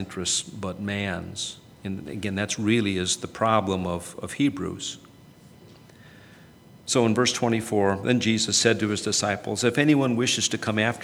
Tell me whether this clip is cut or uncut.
uncut